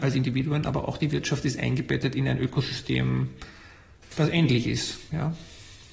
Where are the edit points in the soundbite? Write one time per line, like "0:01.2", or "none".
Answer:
none